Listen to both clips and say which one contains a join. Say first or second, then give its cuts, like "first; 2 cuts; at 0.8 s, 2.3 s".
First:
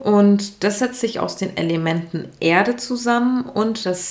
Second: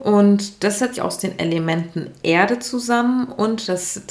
second; 1 cut; at 0.9 s